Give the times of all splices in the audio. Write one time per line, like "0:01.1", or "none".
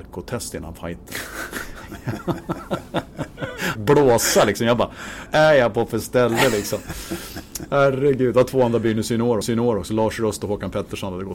0:03.8
0:05.3
0:09.4